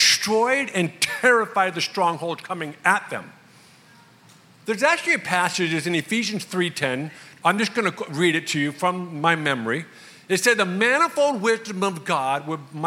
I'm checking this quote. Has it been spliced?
no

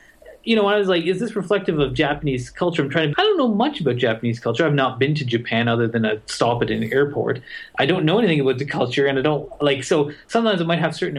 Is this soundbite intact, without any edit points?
no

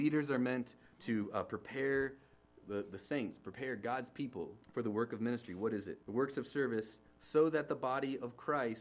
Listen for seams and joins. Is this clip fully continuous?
no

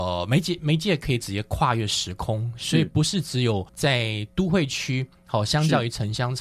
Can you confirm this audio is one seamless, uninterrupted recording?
no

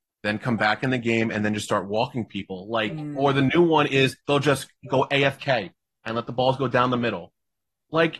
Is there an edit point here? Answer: yes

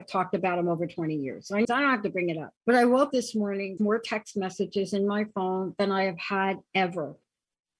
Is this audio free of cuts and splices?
no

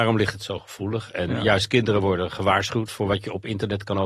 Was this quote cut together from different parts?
no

